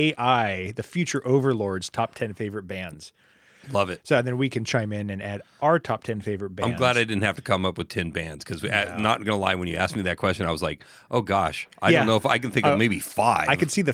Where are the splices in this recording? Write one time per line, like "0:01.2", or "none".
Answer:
none